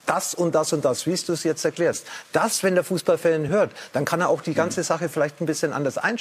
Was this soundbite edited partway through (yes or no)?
no